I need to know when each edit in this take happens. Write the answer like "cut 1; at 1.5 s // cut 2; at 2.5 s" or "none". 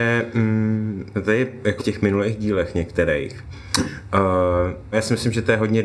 cut 1; at 1.1 s // cut 2; at 1.8 s // cut 3; at 4.9 s